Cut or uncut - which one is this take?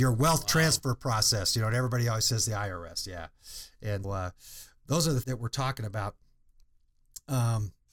cut